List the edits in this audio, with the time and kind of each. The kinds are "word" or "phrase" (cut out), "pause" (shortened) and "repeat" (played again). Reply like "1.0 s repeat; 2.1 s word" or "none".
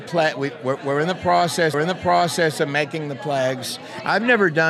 1.7 s repeat